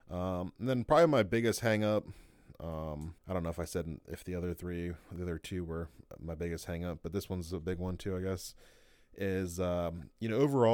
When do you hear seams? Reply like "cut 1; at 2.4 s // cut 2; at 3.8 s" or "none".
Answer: cut 1; at 3.2 s // cut 2; at 4.0 s